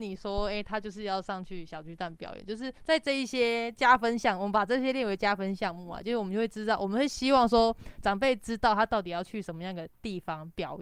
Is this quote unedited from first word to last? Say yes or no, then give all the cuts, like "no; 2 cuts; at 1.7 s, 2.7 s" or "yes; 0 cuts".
no; 1 cut; at 2.8 s